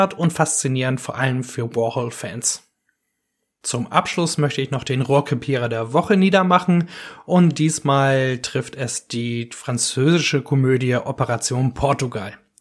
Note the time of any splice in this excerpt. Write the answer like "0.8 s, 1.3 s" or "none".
none